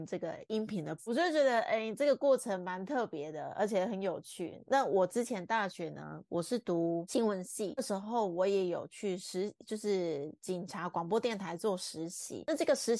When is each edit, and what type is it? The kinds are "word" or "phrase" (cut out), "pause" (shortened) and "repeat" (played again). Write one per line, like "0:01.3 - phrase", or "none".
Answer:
0:01.0 - word